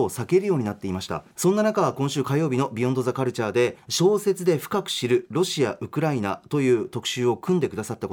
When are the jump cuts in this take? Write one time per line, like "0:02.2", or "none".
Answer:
0:01.3
0:03.8